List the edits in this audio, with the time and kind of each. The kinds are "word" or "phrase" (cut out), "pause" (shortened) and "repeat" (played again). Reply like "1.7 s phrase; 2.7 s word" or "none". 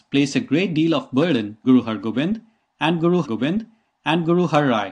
1.6 s word; 3.2 s repeat